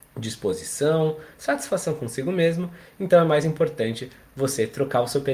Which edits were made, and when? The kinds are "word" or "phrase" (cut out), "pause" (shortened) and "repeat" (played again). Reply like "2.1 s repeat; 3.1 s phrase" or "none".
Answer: none